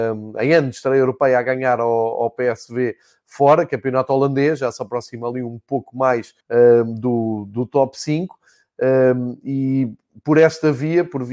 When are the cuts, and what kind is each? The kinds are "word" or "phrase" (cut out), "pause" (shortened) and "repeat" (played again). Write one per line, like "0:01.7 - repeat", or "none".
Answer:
0:06.4 - pause